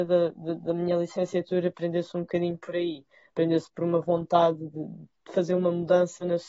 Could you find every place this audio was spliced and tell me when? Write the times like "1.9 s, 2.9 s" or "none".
none

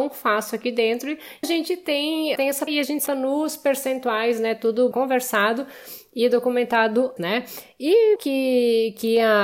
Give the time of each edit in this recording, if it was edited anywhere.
1.4 s, 2.4 s, 2.7 s, 3.1 s, 4.9 s, 7.2 s, 8.2 s

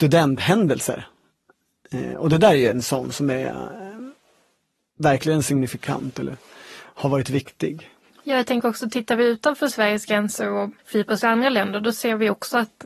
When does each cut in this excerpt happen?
10.8 s

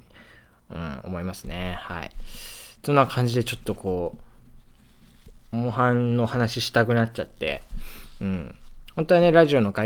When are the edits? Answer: 2.8 s, 5.4 s

